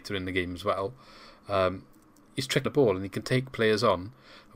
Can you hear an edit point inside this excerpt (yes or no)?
yes